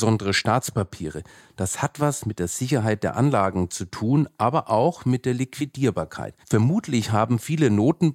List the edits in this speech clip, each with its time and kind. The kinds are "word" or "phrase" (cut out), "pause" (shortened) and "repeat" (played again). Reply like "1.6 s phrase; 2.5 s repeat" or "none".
6.4 s pause